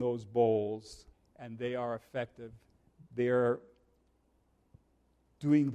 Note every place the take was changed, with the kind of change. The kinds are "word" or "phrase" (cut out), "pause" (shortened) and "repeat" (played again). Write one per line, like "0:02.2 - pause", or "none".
0:01.1 - pause
0:03.1 - pause